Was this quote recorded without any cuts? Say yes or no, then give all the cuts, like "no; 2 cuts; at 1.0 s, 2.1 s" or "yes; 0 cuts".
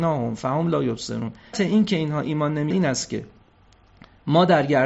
no; 2 cuts; at 1.5 s, 2.7 s